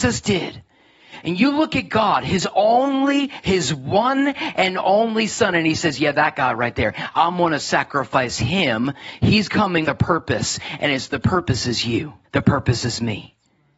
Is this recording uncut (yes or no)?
no